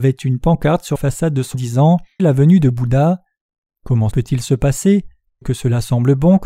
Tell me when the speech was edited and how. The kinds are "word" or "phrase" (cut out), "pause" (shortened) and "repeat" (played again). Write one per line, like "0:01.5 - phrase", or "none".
0:01.0 - word
0:01.5 - word
0:02.2 - word
0:04.1 - word
0:05.4 - word